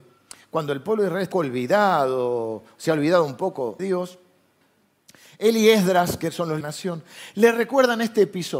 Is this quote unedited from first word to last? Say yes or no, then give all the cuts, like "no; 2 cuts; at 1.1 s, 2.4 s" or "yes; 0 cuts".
no; 3 cuts; at 1.3 s, 3.8 s, 6.6 s